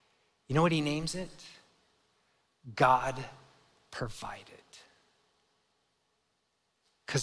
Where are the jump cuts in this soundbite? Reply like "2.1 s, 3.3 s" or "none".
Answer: none